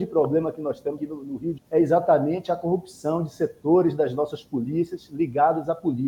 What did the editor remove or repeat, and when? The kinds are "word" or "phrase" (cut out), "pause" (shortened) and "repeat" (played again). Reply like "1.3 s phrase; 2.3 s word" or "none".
1.0 s word; 1.6 s word